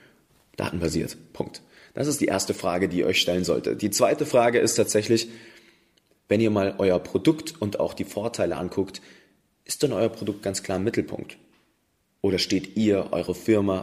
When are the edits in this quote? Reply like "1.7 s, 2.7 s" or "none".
none